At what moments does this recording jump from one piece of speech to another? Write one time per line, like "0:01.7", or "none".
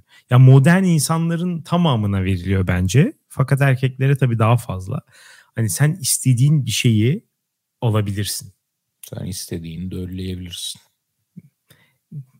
none

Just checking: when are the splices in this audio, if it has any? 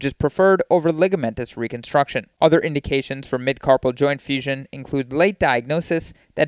0:02.3

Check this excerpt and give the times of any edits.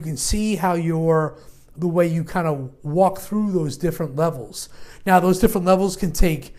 0:01.7

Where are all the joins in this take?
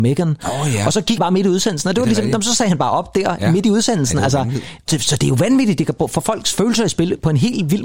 0:01.2

